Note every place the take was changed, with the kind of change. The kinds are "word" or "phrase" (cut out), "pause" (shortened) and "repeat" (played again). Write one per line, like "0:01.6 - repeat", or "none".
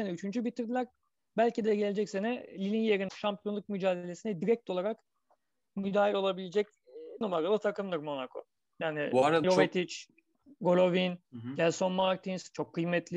0:03.1 - word
0:07.2 - word
0:09.4 - word
0:11.2 - pause